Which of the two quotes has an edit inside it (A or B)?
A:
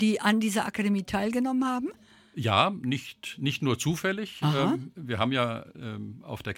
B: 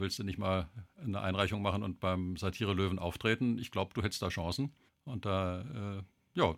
B